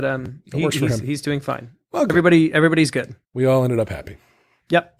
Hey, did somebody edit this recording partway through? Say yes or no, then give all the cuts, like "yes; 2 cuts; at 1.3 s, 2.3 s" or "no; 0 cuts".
yes; 1 cut; at 3.2 s